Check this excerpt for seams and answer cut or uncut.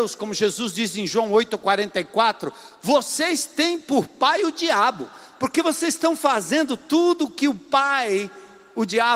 uncut